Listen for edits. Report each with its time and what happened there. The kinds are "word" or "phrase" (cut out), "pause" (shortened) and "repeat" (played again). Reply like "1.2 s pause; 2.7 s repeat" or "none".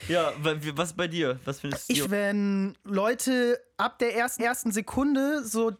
2.0 s phrase; 2.8 s pause; 4.4 s repeat